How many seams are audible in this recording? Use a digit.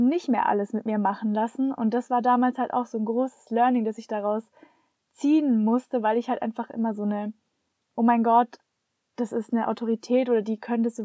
0